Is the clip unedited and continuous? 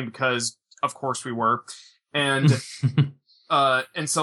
yes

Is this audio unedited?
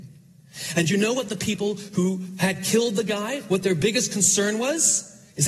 yes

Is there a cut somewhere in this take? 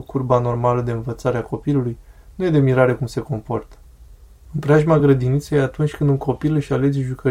no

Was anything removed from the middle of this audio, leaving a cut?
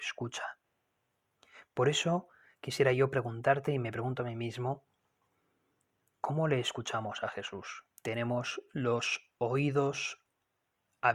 yes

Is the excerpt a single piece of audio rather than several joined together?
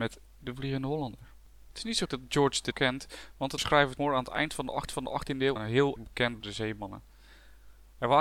no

